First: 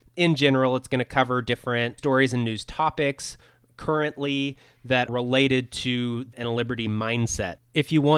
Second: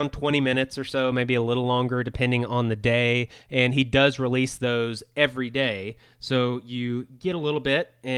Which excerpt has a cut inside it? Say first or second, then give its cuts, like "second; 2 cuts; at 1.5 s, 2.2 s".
first; 3 cuts; at 2.0 s, 5.1 s, 6.3 s